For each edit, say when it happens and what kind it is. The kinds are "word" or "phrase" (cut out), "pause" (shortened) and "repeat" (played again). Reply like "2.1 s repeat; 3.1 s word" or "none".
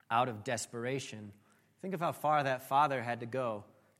none